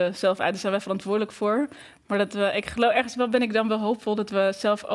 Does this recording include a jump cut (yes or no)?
no